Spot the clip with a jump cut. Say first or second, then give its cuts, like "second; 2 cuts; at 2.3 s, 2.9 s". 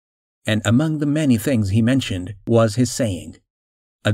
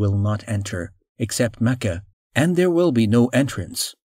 second; 1 cut; at 2.1 s